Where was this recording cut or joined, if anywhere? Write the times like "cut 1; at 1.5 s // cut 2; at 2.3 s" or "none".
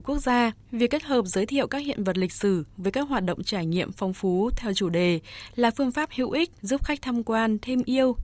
none